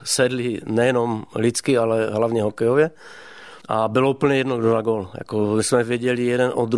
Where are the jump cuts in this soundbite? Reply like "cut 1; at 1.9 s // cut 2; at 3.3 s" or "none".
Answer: cut 1; at 3.6 s